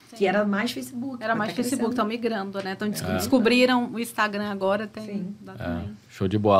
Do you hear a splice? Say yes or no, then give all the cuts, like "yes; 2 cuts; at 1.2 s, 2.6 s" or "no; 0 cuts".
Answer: no; 0 cuts